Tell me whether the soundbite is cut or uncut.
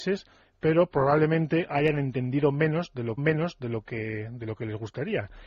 cut